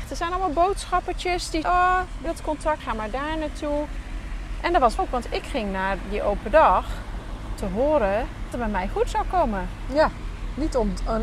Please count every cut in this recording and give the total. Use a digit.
6